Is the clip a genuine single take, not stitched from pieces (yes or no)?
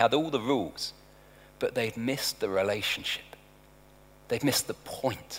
yes